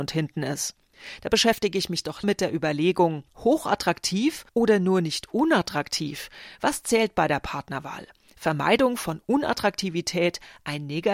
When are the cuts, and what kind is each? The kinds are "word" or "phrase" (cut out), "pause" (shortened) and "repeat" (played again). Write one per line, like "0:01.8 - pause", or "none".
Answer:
0:02.2 - word
0:04.5 - pause